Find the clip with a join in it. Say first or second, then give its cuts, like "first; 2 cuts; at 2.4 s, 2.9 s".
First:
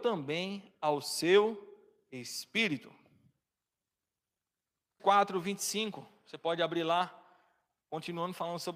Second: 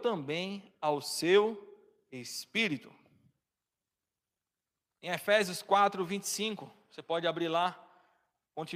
first; 1 cut; at 5.0 s